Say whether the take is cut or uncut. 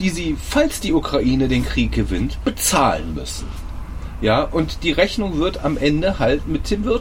uncut